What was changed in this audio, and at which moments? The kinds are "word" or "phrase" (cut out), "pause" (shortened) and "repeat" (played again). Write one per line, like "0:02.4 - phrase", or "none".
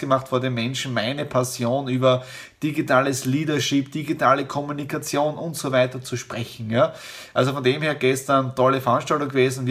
none